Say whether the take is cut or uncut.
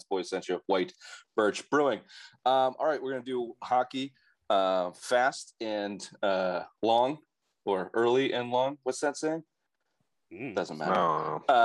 uncut